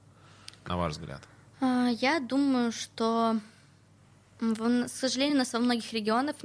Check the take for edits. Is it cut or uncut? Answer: uncut